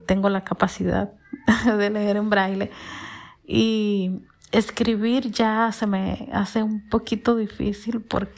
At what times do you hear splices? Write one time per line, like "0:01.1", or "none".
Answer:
none